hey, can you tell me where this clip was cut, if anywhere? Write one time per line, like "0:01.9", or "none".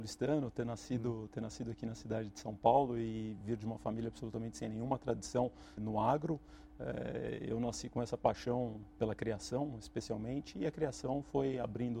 0:05.8